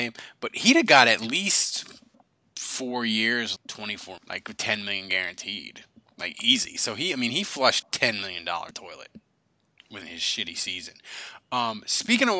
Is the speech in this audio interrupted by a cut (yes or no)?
yes